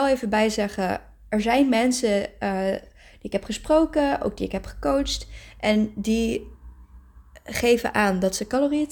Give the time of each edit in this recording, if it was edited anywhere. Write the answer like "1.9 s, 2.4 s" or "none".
none